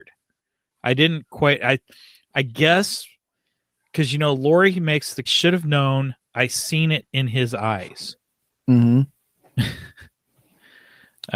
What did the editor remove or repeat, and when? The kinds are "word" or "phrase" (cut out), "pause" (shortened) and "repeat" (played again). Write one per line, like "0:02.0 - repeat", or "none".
0:05.3 - phrase